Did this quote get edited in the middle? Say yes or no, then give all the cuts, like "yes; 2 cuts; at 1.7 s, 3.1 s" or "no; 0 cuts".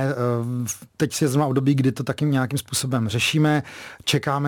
no; 0 cuts